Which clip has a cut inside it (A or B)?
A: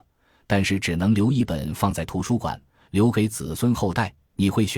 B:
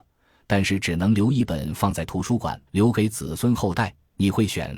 B